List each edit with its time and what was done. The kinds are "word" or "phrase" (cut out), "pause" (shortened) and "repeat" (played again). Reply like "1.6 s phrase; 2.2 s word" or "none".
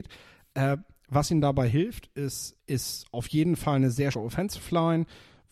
2.6 s word; 4.1 s word